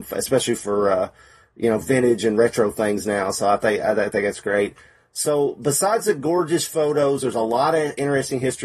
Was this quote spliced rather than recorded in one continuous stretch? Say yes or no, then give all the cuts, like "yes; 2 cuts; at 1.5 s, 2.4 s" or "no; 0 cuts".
no; 0 cuts